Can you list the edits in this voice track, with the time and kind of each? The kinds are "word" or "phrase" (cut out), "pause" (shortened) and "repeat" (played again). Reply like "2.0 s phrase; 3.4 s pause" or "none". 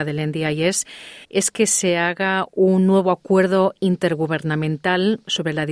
1.2 s pause